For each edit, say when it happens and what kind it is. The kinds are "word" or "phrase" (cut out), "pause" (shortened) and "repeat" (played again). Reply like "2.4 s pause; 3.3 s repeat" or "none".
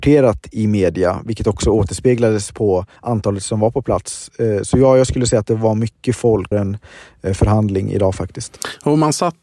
3.0 s pause; 6.5 s word